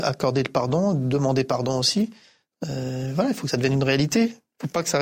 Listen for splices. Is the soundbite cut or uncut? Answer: uncut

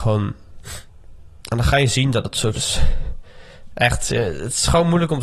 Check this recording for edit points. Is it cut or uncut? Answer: cut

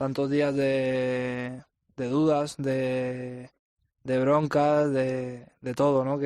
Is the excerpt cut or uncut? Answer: uncut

